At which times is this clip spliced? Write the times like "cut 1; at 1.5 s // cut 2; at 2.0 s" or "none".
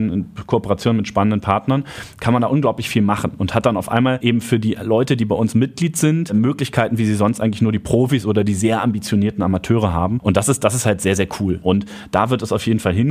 none